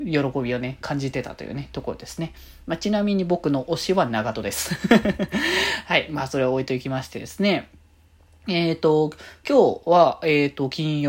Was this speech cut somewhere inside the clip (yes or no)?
no